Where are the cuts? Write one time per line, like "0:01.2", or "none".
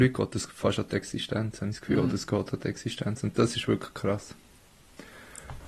none